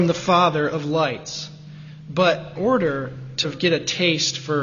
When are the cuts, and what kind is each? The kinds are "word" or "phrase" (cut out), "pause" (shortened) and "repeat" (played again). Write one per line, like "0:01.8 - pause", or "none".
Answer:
0:02.6 - word
0:03.4 - word